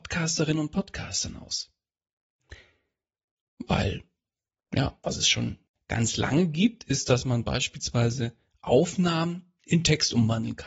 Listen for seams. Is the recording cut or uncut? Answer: uncut